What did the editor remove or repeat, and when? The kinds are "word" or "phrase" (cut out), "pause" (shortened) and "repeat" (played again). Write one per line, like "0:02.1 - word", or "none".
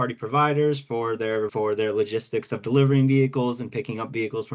0:01.5 - word